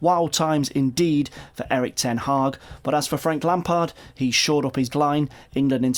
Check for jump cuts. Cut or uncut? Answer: cut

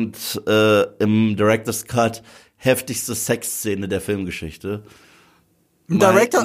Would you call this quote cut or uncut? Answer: uncut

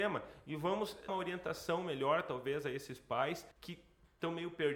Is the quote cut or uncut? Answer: cut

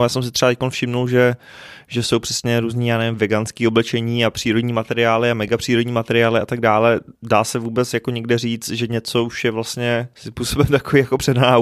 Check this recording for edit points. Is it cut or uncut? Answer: cut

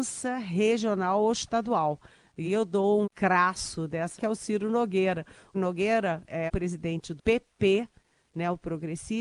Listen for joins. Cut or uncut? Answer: cut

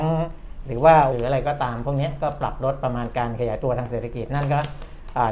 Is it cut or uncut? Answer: cut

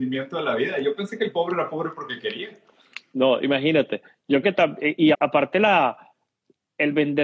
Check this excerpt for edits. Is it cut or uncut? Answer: cut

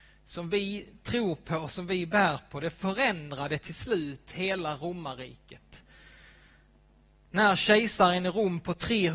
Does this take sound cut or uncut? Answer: uncut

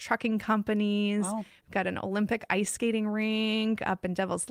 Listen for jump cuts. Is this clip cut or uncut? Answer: uncut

